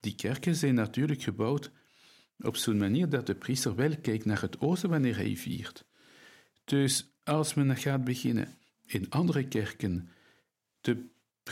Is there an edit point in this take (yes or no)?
no